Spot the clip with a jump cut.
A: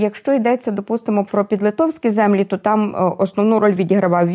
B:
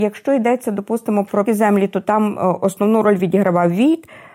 B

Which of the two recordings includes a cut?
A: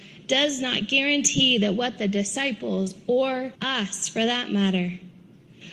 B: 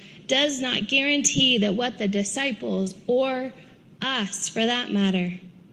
A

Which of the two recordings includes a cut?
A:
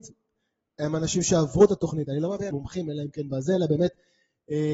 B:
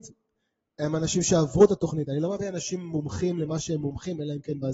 A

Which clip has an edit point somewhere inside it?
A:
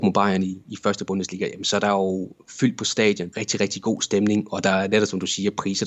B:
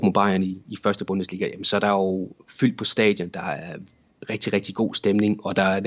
A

